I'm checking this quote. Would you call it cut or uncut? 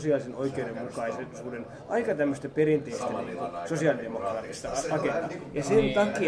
uncut